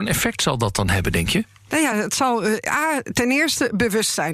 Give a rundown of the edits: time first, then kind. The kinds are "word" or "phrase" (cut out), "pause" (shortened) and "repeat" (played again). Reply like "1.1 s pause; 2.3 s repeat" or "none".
none